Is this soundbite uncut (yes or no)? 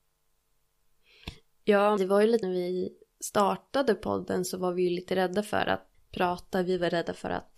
no